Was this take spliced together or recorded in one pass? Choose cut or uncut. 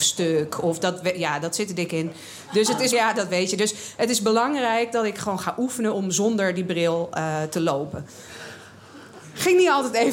cut